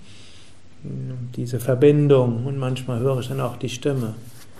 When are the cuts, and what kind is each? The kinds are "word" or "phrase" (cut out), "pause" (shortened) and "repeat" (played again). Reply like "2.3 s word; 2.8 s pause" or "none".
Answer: none